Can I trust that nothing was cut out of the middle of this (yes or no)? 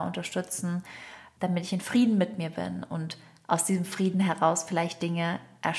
yes